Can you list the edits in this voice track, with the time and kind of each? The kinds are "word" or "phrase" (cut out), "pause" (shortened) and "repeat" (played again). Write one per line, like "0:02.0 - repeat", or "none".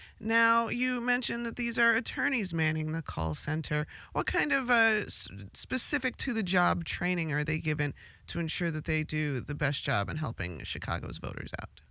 none